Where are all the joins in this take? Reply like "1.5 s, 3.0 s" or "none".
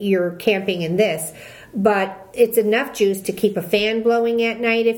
none

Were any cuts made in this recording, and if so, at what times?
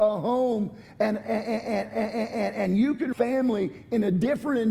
1.9 s, 3.1 s

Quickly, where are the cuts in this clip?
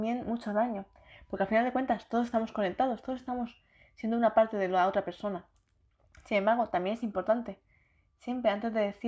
none

